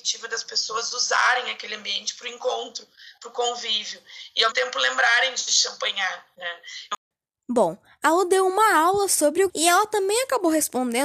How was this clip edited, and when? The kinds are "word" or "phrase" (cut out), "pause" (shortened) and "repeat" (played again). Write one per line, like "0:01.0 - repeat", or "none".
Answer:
0:04.5 - word
0:09.5 - word